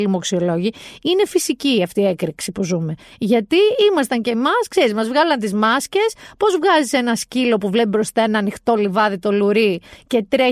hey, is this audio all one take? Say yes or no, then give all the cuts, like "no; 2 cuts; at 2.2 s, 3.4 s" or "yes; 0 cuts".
yes; 0 cuts